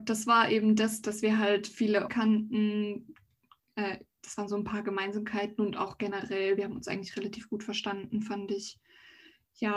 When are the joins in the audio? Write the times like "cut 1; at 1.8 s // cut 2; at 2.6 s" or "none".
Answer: cut 1; at 2.1 s